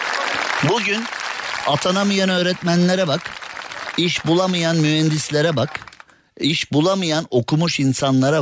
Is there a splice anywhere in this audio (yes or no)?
no